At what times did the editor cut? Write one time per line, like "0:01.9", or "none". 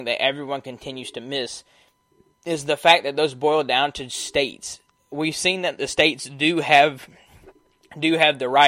none